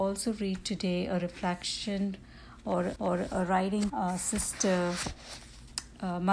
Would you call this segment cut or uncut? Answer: cut